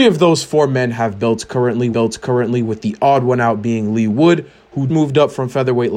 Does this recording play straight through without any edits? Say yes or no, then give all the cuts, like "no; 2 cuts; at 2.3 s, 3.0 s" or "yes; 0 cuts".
no; 2 cuts; at 1.9 s, 4.9 s